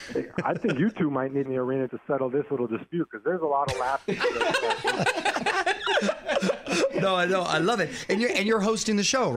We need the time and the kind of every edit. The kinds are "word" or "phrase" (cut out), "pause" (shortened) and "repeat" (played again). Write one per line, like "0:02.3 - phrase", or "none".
0:01.5 - phrase
0:01.9 - word